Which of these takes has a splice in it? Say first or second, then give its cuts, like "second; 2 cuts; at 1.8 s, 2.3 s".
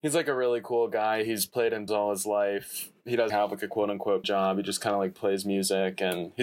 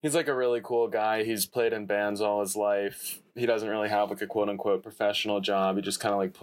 first; 3 cuts; at 1.9 s, 3.3 s, 4.2 s